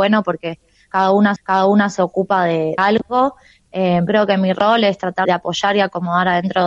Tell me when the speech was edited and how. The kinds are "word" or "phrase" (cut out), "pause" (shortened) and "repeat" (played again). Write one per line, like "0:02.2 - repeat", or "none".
0:01.4 - repeat
0:02.8 - word
0:04.1 - phrase
0:05.2 - word

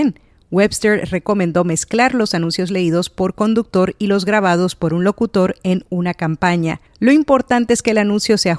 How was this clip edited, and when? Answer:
0:06.9 - pause

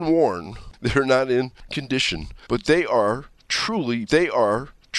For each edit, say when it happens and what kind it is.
0:01.7 - word
0:04.1 - repeat

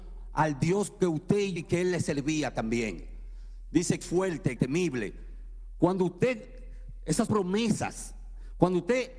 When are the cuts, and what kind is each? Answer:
0:01.6 - word
0:04.0 - word
0:04.6 - word
0:07.3 - word

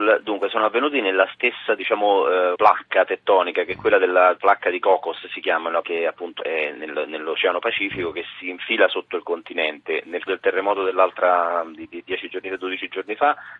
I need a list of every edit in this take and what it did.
0:02.6 - word
0:05.8 - phrase
0:06.4 - word
0:10.3 - word

